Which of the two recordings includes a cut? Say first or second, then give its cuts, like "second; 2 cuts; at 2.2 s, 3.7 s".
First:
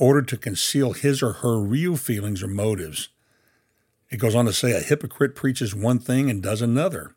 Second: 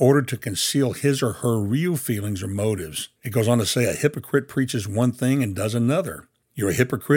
second; 1 cut; at 3.2 s